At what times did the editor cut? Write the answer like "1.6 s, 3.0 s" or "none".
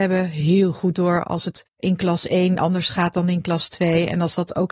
1.7 s